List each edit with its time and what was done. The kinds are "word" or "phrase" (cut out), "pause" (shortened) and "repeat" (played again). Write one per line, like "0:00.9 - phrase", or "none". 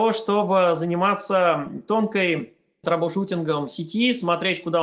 0:02.8 - word

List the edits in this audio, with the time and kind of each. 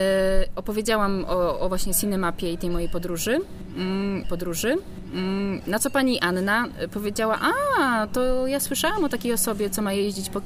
0:04.2 - repeat

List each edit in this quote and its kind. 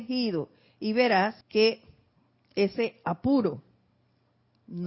0:01.4 - pause

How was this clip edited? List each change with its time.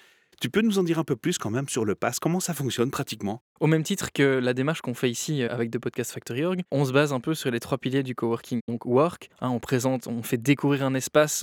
0:03.5 - pause
0:09.3 - pause

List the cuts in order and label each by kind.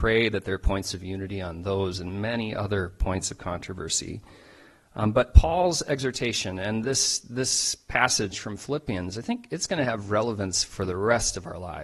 none

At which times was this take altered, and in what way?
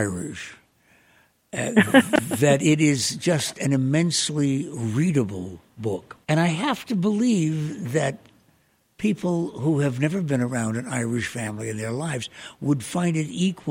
0:06.2 - pause

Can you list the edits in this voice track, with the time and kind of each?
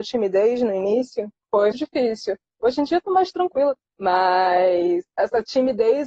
0:01.7 - word

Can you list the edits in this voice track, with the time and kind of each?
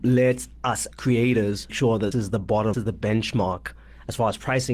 0:00.9 - word
0:01.7 - word
0:02.1 - word
0:02.7 - word

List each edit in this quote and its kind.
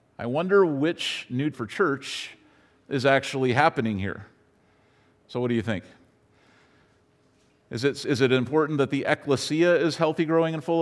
0:01.5 - phrase

